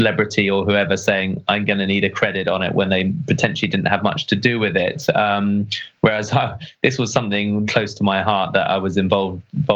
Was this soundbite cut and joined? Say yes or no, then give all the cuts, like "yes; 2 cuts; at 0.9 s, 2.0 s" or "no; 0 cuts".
yes; 1 cut; at 7.7 s